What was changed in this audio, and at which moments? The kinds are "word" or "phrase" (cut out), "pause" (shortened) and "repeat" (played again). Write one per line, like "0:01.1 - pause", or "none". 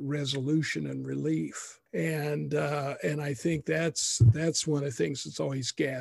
0:01.9 - pause